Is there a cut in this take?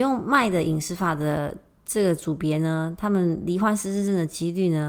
no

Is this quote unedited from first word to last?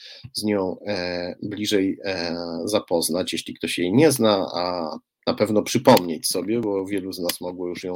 yes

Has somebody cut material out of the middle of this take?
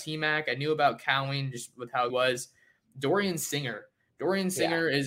yes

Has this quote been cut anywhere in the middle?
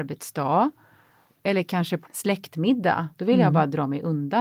yes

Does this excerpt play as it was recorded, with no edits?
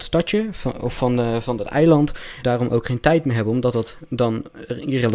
no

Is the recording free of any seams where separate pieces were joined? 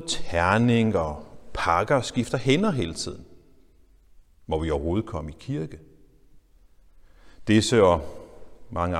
yes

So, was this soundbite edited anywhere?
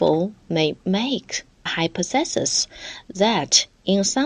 yes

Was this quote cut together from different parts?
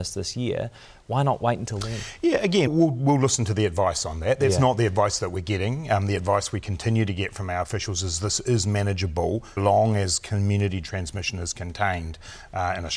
yes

